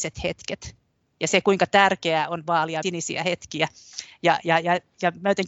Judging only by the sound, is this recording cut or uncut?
cut